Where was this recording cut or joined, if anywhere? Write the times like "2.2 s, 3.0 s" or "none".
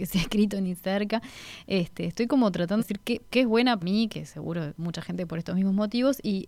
2.8 s, 3.3 s, 3.8 s, 4.8 s